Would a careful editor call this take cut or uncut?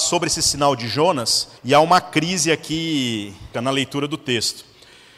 cut